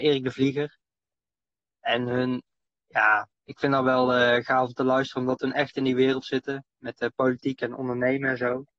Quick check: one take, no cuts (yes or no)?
no